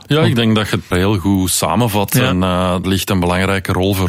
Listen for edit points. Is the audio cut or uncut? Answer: cut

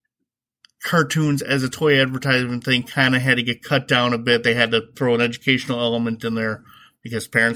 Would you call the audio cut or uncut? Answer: uncut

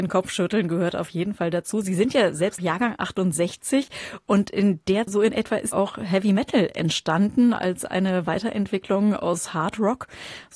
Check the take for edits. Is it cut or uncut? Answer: cut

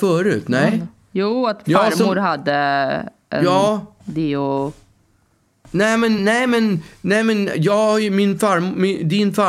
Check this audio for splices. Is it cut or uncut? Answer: uncut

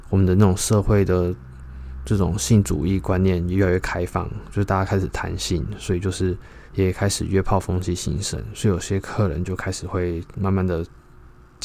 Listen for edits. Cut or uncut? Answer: cut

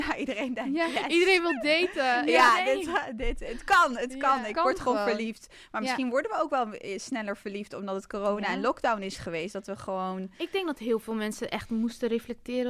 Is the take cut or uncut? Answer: uncut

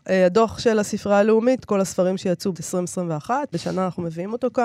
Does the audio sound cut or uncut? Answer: cut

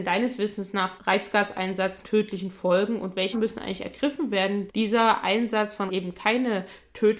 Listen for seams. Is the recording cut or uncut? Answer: cut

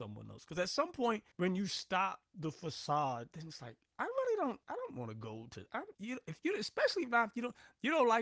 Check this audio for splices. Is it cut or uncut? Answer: cut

